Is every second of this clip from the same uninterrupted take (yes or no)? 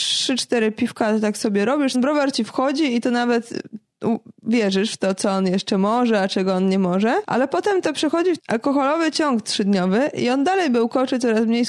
no